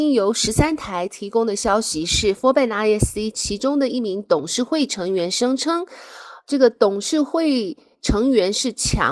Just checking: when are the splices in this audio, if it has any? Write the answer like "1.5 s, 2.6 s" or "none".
none